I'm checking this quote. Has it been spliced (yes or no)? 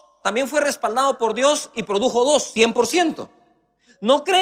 no